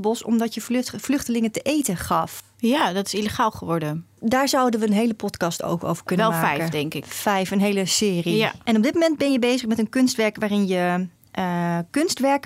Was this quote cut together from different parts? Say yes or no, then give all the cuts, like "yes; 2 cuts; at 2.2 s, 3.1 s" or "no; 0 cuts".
no; 0 cuts